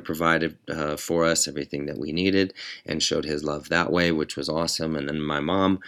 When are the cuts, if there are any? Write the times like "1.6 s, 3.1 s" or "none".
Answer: none